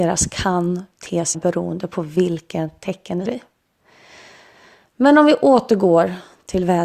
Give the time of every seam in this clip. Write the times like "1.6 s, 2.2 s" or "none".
1.3 s, 3.3 s

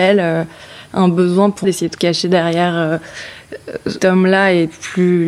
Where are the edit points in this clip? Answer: 1.6 s, 2.0 s, 4.0 s

